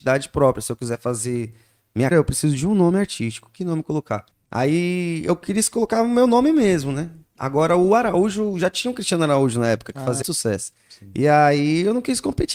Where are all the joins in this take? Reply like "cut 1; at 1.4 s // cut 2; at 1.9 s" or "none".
cut 1; at 2.1 s // cut 2; at 4.3 s // cut 3; at 10.2 s